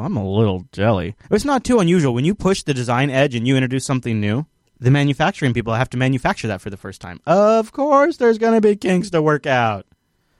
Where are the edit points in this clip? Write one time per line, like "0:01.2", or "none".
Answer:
0:01.2
0:04.6